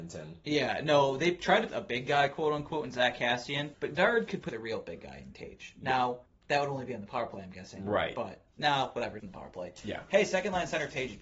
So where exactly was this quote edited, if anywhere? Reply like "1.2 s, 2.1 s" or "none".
1.7 s, 3.7 s, 4.5 s, 6.3 s, 8.5 s, 9.2 s